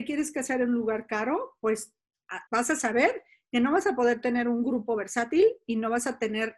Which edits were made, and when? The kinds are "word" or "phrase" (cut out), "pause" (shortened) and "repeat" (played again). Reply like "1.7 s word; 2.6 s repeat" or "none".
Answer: 2.5 s pause